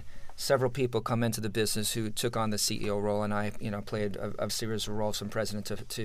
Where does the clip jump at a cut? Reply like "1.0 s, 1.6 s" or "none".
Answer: 4.5 s